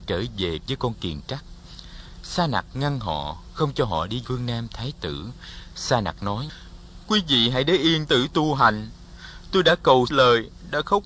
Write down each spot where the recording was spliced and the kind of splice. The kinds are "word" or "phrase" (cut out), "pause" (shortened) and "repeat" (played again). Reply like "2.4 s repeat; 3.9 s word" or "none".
4.2 s word; 4.7 s word; 8.1 s phrase; 10.1 s phrase